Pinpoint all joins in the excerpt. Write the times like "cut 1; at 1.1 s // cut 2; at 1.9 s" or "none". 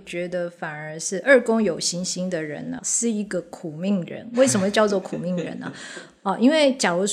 cut 1; at 2.8 s